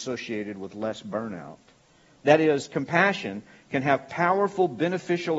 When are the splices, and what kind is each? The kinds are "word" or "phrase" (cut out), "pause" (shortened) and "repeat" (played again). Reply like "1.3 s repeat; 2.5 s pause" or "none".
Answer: none